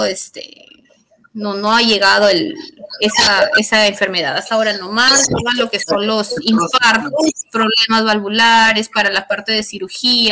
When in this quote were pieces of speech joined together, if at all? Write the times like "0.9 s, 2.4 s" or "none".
none